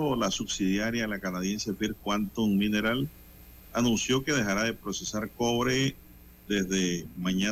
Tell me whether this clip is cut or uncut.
uncut